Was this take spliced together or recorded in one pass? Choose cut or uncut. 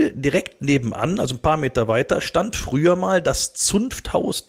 uncut